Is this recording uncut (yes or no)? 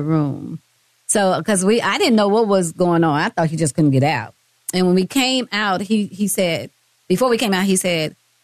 yes